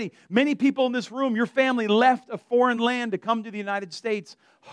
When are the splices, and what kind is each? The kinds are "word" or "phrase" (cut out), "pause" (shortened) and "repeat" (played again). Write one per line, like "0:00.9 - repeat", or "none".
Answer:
none